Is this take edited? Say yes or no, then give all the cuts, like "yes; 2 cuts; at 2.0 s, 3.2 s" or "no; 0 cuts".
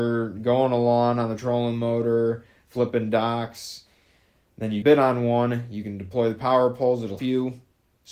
yes; 2 cuts; at 4.8 s, 7.2 s